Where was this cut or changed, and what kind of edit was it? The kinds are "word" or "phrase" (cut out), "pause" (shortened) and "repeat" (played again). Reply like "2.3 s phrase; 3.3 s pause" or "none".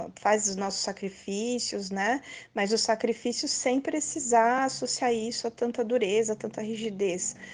none